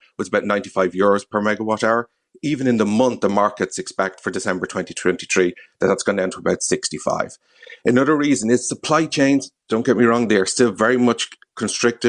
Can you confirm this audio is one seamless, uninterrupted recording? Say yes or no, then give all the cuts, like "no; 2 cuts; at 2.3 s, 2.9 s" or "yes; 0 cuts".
yes; 0 cuts